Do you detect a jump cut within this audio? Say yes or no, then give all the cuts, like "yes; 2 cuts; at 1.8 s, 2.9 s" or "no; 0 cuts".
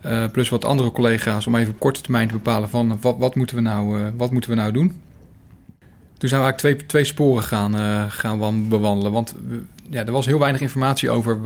no; 0 cuts